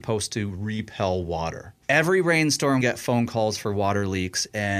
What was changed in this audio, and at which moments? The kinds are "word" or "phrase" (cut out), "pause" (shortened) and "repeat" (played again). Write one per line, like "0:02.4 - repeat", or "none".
0:01.8 - pause
0:02.8 - word